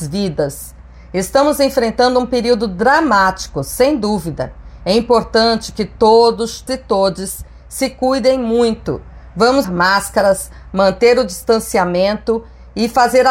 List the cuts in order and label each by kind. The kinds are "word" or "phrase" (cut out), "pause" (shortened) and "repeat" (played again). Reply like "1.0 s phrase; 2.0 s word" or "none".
6.7 s word; 9.6 s word